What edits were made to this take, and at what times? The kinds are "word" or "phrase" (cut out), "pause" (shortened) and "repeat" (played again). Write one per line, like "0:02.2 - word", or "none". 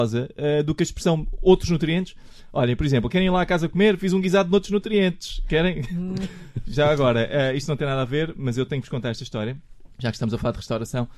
0:09.9 - pause